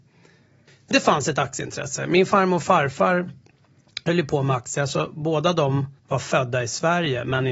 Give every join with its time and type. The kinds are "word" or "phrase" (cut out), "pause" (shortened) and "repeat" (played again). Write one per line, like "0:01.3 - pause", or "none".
0:00.9 - word
0:06.0 - pause